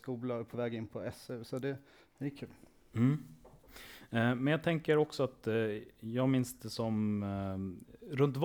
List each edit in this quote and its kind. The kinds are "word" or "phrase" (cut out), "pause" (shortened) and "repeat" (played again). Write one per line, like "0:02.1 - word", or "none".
none